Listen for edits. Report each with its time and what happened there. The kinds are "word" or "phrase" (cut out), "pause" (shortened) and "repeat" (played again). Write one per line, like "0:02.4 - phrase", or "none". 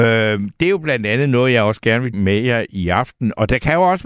0:02.1 - word